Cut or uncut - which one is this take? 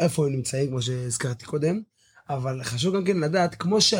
uncut